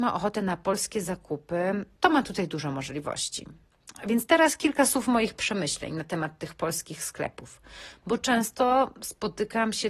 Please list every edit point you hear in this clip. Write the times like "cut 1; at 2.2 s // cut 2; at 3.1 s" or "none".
cut 1; at 2.0 s

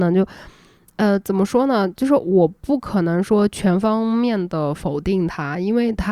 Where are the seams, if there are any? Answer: none

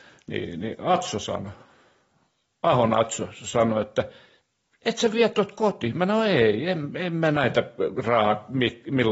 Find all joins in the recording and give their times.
none

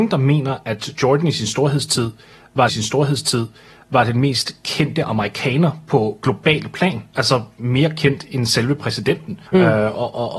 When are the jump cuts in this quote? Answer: cut 1; at 2.7 s // cut 2; at 9.5 s

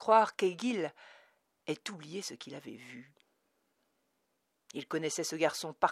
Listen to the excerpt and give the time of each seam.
none

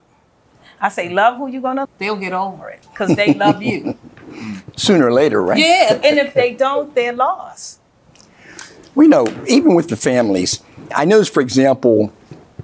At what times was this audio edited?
cut 1; at 1.8 s // cut 2; at 2.8 s // cut 3; at 10.9 s

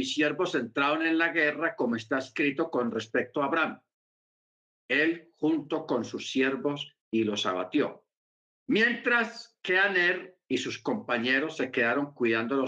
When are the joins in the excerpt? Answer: cut 1; at 7.0 s // cut 2; at 8.4 s

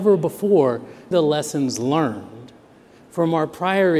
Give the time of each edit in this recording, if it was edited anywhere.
cut 1; at 1.1 s

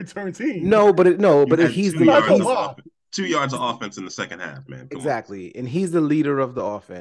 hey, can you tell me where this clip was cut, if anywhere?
none

